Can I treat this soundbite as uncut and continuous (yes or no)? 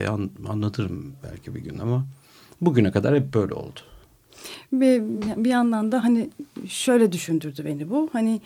yes